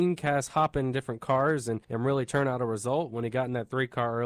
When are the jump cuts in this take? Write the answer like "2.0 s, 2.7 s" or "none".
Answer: 1.8 s